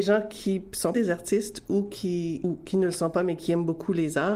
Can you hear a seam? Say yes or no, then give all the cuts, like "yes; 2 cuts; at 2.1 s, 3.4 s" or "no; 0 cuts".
yes; 2 cuts; at 0.9 s, 2.4 s